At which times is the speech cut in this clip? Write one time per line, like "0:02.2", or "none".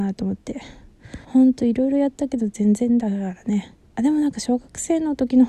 0:01.2
0:03.8